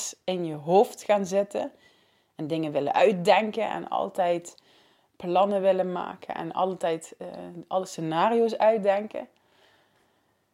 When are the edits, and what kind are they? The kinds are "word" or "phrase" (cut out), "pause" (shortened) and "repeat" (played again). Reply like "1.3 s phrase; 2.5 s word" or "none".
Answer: none